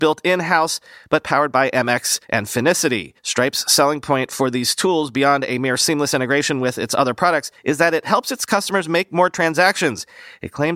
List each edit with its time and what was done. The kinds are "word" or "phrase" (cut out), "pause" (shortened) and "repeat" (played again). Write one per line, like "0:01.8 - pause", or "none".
0:02.2 - pause
0:03.2 - pause
0:07.6 - pause